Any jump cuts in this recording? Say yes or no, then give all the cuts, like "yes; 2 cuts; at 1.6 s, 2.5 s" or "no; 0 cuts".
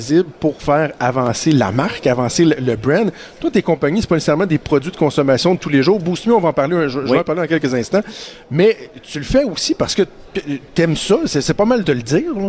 no; 0 cuts